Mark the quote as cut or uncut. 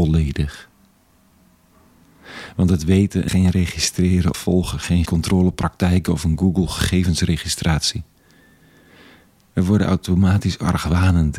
cut